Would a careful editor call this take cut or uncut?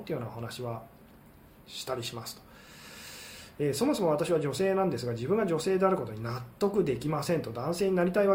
uncut